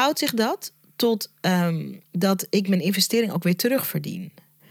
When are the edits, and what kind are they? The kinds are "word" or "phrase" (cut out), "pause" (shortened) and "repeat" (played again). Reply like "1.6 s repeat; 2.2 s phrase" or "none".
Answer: 2.1 s pause